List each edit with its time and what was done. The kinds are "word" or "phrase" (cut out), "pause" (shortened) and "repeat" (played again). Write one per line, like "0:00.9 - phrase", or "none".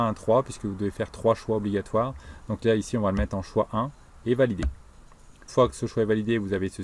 0:05.5 - word